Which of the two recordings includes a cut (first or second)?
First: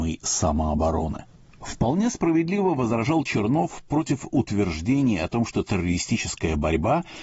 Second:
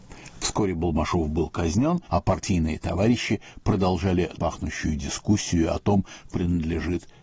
second